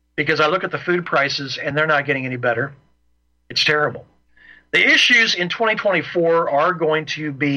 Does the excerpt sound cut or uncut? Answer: uncut